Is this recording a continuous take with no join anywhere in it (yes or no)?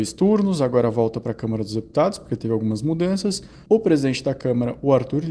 no